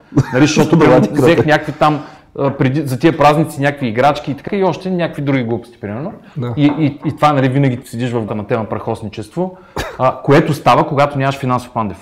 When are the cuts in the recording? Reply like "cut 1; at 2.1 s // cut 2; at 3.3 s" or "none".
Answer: cut 1; at 4.5 s // cut 2; at 7.8 s // cut 3; at 8.3 s